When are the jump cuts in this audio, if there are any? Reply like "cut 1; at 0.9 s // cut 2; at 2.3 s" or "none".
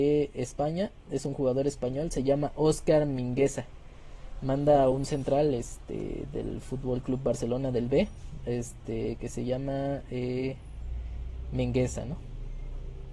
none